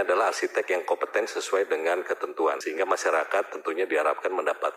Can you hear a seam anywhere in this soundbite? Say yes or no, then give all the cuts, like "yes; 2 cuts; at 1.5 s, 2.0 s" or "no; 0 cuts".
no; 0 cuts